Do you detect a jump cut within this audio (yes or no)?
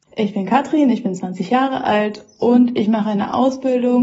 no